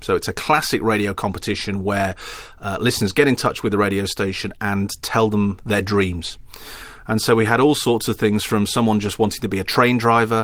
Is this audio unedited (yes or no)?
yes